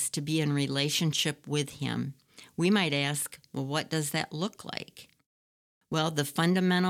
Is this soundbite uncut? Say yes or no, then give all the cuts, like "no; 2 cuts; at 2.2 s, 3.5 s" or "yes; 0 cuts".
yes; 0 cuts